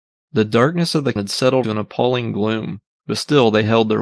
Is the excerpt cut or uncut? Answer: cut